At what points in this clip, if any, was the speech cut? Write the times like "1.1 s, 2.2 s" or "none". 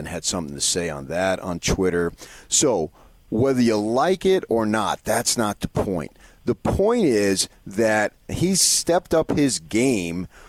none